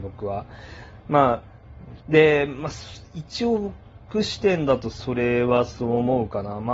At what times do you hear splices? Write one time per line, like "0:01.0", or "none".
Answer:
0:02.0